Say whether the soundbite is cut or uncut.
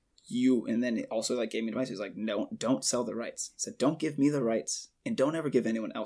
uncut